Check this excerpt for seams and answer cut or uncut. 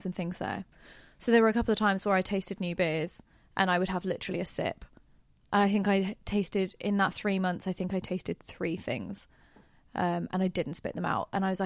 uncut